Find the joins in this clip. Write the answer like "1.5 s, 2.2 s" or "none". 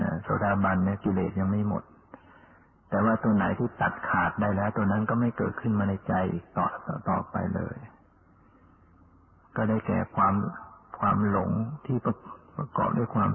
none